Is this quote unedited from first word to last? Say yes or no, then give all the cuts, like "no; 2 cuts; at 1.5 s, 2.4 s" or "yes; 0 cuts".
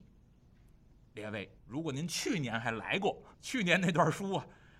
no; 2 cuts; at 1.6 s, 3.3 s